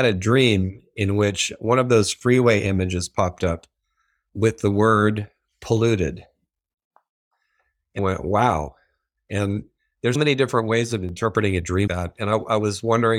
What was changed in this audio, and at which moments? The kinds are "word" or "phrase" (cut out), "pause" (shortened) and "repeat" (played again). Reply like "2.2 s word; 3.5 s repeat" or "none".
8.0 s word; 10.1 s word; 11.9 s word